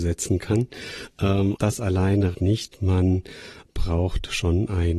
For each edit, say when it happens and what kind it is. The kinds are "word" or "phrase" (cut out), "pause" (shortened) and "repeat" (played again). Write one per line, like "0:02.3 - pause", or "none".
0:01.6 - word
0:02.3 - word